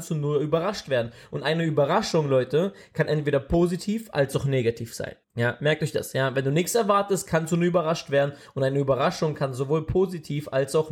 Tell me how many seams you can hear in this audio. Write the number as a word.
one